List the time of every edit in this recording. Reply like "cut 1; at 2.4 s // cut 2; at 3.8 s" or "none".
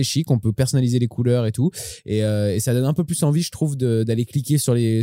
none